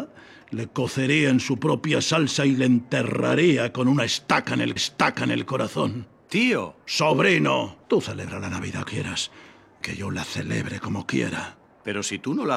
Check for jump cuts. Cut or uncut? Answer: cut